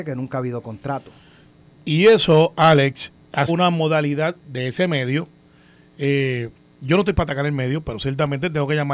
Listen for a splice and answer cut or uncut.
cut